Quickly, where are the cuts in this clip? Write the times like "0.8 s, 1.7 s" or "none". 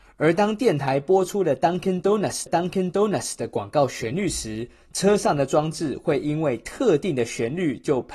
2.5 s